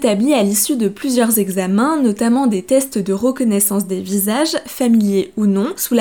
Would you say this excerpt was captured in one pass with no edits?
yes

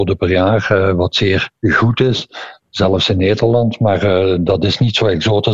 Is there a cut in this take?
yes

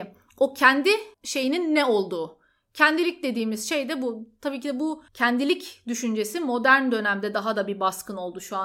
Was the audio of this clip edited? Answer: yes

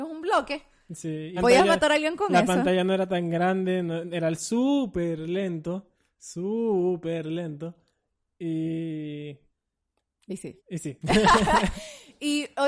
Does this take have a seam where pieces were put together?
yes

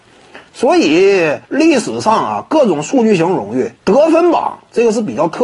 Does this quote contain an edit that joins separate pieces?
yes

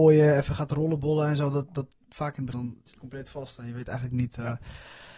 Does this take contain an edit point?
yes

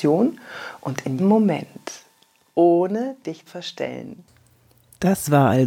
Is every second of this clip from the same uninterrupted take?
no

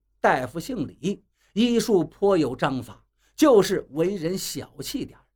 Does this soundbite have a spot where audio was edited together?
no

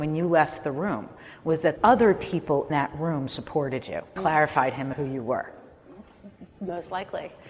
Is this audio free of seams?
no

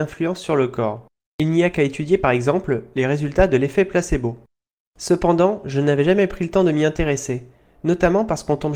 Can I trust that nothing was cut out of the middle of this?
yes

